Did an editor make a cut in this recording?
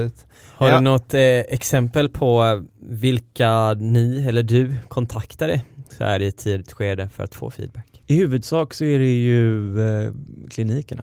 yes; 2 cuts; at 2.7 s, 8.0 s

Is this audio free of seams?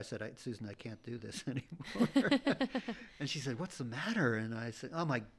yes; 0 cuts

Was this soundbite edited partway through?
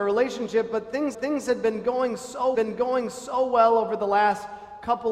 yes; 2 cuts; at 1.1 s, 2.5 s

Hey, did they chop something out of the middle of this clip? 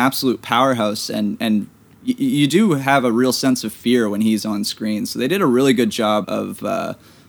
yes; 1 cut; at 6.2 s

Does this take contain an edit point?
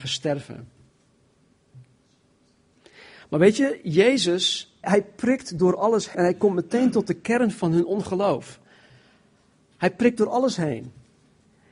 yes; 2 cuts; at 4.8 s, 6.1 s

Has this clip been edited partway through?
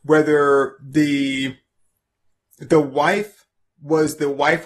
no; 0 cuts

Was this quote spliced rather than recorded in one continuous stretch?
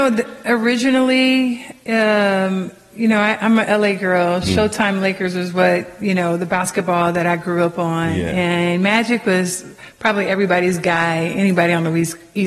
yes; 1 cut; at 4.4 s

